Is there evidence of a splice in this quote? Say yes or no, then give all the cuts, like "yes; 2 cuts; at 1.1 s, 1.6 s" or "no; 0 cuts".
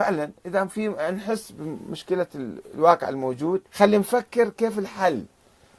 yes; 1 cut; at 3.7 s